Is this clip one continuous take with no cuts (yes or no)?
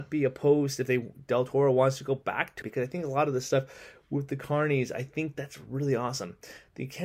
no